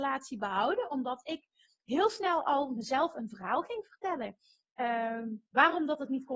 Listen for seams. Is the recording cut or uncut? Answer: uncut